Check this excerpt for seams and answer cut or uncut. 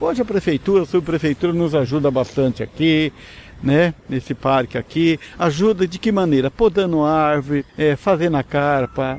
cut